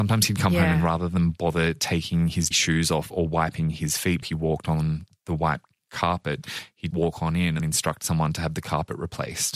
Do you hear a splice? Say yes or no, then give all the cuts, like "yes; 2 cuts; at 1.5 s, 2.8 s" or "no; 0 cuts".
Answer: yes; 4 cuts; at 2.5 s, 4.2 s, 6.9 s, 7.6 s